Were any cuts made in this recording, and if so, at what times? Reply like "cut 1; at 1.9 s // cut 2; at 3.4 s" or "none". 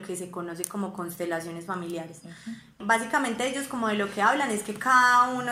none